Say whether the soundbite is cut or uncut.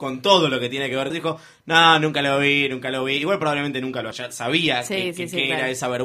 cut